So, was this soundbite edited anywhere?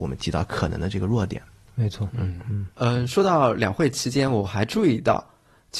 yes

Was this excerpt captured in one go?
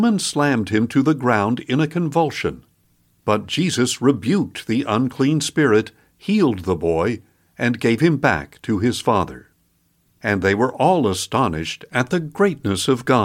yes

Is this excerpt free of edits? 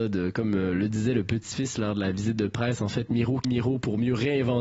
no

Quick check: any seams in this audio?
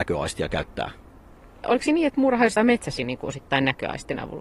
yes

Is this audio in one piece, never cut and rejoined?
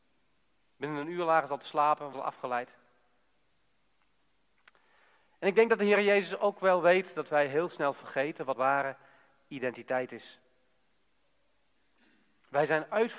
no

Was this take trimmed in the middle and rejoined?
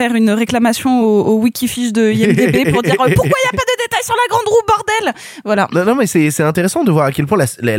no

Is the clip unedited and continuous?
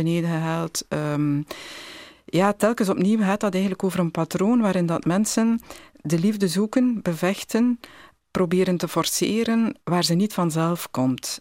no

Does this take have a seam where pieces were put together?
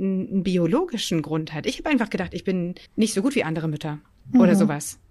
yes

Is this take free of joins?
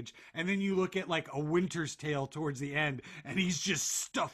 yes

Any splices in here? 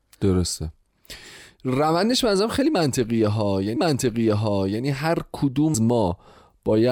yes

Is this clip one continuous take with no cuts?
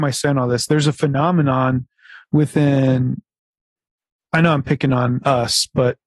yes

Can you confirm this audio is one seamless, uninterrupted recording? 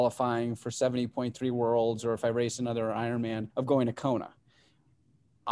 no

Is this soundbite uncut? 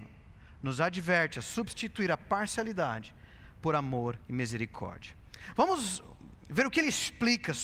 no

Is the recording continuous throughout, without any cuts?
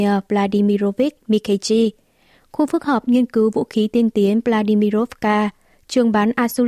yes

